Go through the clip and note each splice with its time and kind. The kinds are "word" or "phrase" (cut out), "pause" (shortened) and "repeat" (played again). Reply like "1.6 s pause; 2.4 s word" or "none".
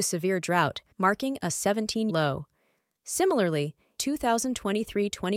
0.9 s pause; 2.1 s word; 4.0 s word